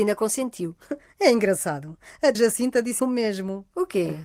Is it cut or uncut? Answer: cut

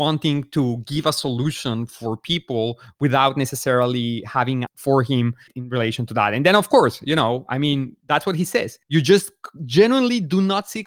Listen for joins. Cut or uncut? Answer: cut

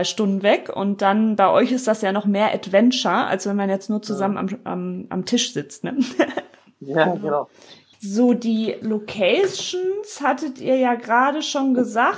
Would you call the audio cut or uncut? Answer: uncut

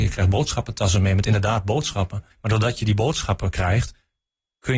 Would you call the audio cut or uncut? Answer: cut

